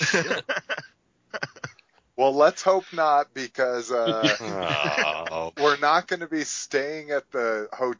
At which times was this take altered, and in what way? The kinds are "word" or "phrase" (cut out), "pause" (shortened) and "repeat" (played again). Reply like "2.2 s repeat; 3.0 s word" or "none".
5.6 s word